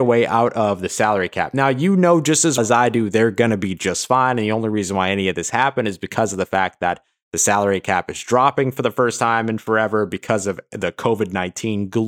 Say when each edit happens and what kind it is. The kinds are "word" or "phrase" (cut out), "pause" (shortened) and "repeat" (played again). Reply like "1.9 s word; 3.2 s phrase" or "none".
2.6 s word